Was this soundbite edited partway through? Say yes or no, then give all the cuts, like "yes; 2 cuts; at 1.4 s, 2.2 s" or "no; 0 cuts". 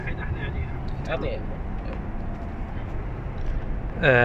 yes; 1 cut; at 1.1 s